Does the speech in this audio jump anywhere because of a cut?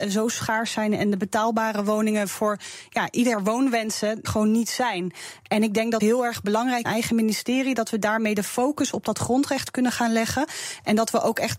yes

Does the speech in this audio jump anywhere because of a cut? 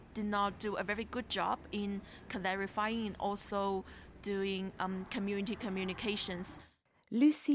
no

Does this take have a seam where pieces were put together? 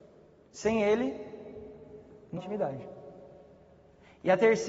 yes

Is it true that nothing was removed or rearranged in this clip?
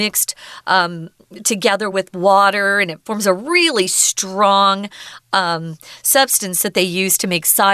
yes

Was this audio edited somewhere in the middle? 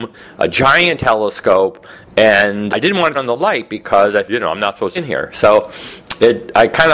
yes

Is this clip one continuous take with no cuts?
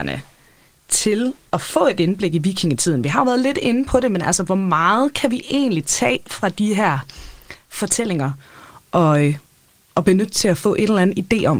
yes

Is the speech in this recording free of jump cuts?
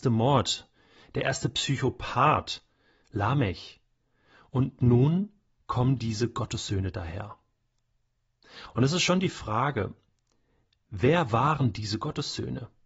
yes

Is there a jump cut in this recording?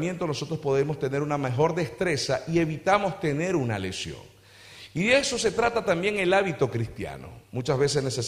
no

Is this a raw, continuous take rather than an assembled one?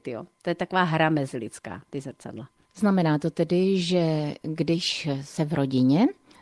yes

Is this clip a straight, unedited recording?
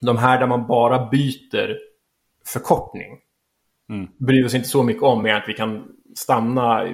yes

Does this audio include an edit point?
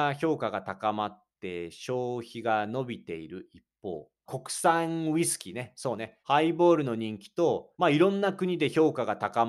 yes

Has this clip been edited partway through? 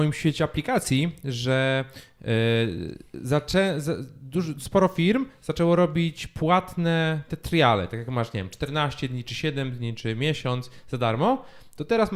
no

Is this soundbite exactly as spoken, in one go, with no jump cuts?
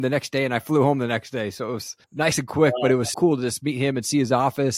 no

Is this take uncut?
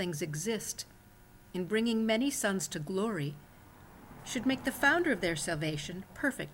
yes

